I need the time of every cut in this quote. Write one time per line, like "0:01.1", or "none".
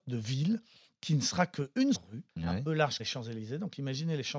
0:01.9
0:02.3
0:03.0